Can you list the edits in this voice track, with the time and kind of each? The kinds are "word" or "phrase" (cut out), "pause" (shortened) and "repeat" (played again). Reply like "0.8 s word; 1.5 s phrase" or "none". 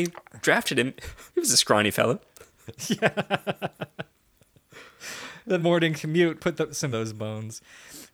1.3 s pause; 5.6 s word; 6.4 s word; 6.9 s phrase